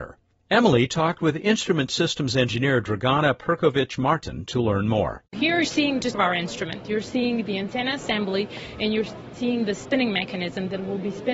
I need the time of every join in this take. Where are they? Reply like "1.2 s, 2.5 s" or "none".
5.6 s, 6.1 s